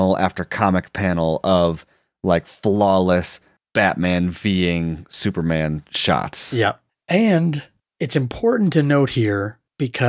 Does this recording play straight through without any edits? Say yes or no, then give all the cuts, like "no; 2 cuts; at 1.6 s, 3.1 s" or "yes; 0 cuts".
yes; 0 cuts